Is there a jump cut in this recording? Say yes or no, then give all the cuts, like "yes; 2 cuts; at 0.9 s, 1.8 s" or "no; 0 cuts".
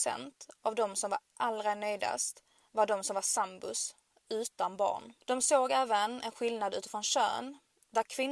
yes; 1 cut; at 5.2 s